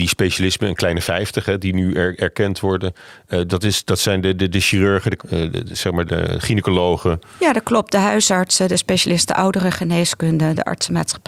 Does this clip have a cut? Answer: yes; 3 cuts; at 3.5 s, 5.2 s, 6.1 s

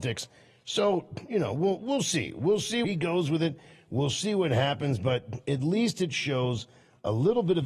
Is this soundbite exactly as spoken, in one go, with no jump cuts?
no; 1 cut; at 2.8 s

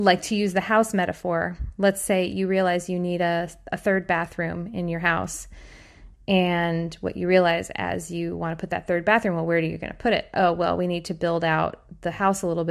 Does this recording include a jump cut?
no; 0 cuts

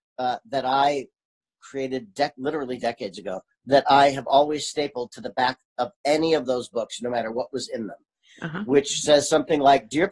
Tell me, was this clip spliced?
no; 0 cuts

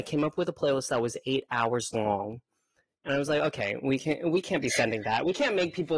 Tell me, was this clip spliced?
no; 0 cuts

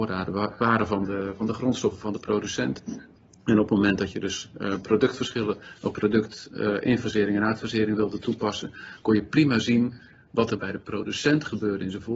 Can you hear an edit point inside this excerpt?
no; 0 cuts

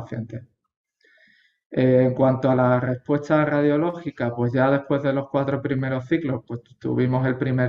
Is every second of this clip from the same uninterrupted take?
yes; 0 cuts

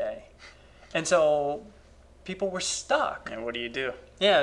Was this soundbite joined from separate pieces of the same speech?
no; 0 cuts

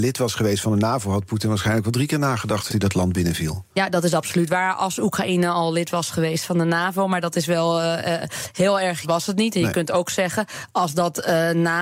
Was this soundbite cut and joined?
yes; 3 cuts; at 2.7 s, 3.7 s, 9.0 s

